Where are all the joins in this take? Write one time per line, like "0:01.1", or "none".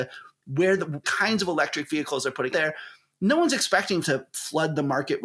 0:01.0
0:02.5
0:04.0